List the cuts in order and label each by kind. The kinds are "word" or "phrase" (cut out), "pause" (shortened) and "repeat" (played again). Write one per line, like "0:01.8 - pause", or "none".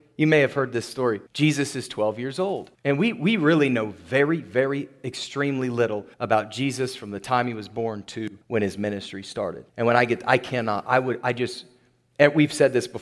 0:01.3 - pause
0:02.7 - pause
0:06.1 - pause
0:08.4 - pause
0:09.7 - pause